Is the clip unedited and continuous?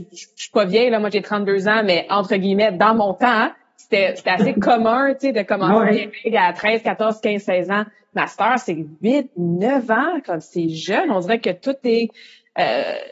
yes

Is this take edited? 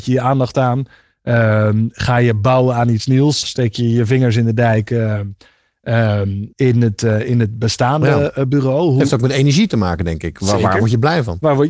yes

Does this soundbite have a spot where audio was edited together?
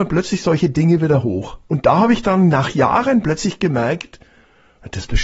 no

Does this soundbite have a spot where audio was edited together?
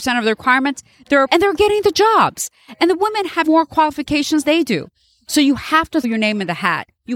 yes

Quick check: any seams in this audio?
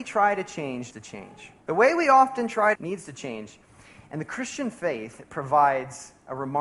yes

